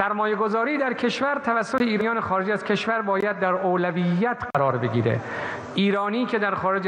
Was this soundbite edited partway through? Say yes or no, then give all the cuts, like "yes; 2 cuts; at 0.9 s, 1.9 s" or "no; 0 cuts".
no; 0 cuts